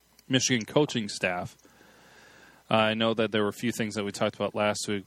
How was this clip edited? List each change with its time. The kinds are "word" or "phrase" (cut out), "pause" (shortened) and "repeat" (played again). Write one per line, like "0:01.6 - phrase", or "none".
none

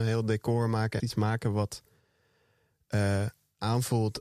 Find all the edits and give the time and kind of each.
0:01.0 - phrase

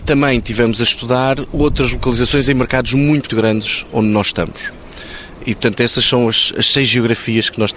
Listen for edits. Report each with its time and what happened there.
0:03.3 - word

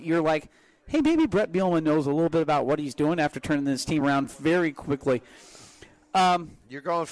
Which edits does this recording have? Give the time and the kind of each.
none

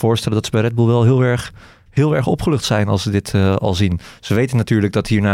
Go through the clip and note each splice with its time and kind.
none

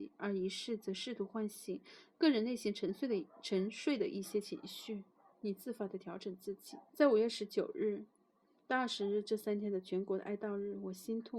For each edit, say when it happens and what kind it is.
0:06.9 - pause

